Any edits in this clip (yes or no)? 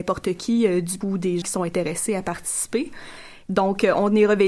yes